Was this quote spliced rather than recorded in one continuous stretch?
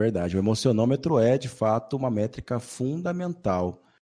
no; 0 cuts

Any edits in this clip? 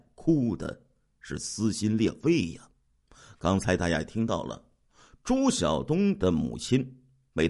no; 0 cuts

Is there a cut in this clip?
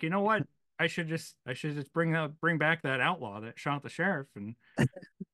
yes; 2 cuts; at 1.4 s, 2.4 s

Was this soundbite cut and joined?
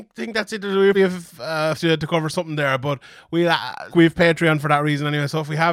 yes; 3 cuts; at 0.9 s, 1.8 s, 3.9 s

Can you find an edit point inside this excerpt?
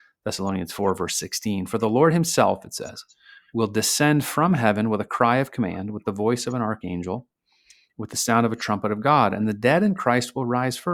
no; 0 cuts

